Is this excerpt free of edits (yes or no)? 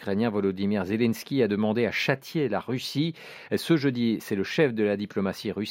yes